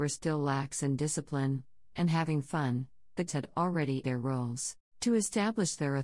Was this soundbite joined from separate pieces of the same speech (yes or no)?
yes